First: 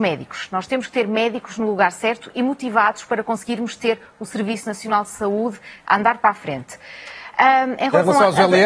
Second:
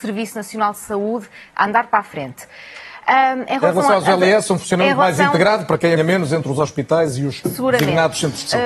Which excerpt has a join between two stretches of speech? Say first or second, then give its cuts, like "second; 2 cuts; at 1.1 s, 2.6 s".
second; 1 cut; at 6.0 s